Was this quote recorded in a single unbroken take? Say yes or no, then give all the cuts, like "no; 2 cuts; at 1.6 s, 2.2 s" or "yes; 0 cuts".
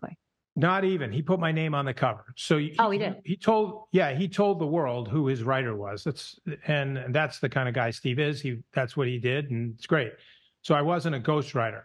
yes; 0 cuts